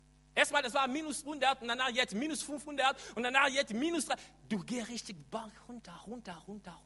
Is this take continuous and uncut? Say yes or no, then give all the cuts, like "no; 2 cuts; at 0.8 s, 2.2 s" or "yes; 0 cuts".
yes; 0 cuts